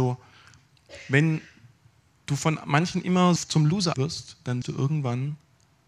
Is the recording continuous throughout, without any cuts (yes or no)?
no